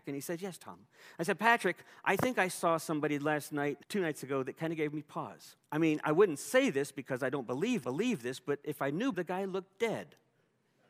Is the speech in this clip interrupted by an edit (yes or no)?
yes